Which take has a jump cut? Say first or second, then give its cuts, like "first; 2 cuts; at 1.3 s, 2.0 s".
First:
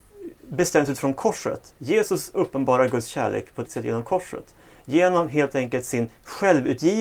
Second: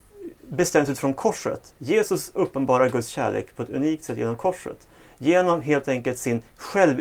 first; 1 cut; at 3.7 s